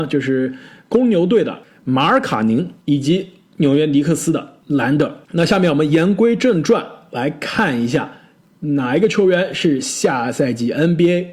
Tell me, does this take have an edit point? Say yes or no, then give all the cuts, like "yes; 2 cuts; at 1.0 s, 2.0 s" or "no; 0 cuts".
yes; 3 cuts; at 2.8 s, 4.6 s, 5.2 s